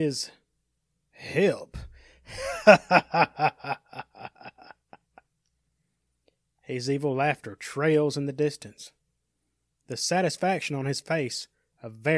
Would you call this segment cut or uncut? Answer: uncut